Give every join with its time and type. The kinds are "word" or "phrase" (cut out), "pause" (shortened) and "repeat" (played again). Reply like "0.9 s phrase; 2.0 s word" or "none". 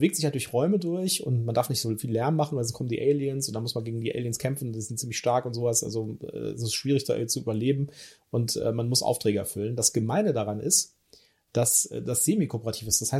none